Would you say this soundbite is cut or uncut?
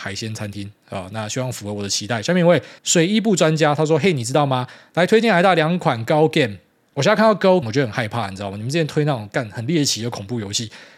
cut